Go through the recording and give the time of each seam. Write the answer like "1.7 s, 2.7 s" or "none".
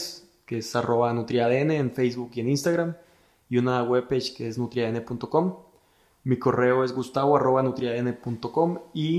none